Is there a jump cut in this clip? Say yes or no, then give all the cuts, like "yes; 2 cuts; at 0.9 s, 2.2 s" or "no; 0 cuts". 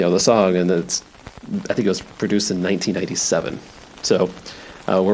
no; 0 cuts